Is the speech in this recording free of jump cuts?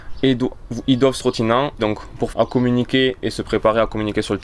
no; 3 cuts; at 1.2 s, 1.8 s, 2.3 s

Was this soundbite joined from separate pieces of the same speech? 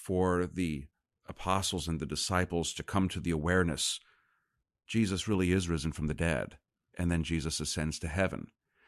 no; 0 cuts

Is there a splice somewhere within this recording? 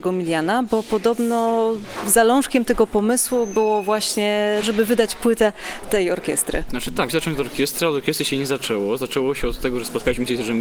yes; 2 cuts; at 4.6 s, 7.1 s

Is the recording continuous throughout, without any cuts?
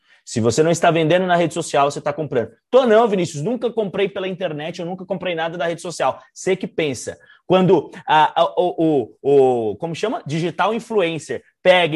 yes; 0 cuts

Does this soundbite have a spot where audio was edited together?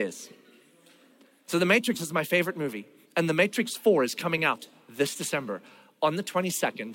no; 0 cuts

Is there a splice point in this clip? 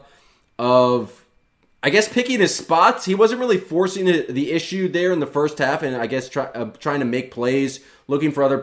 no; 0 cuts

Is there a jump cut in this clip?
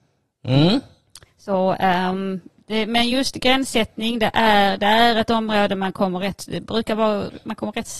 no; 0 cuts

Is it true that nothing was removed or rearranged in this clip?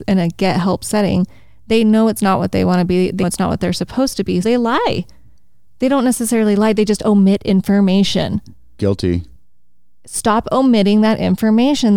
no; 2 cuts; at 3.2 s, 4.4 s

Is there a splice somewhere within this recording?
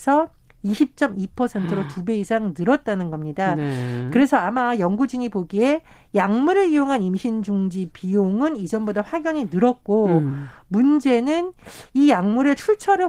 no; 0 cuts

